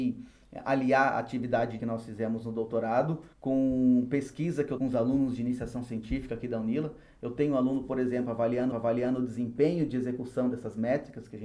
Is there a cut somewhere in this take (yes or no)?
yes